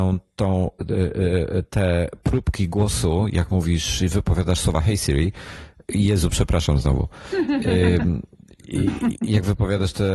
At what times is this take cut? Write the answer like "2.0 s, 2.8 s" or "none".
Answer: none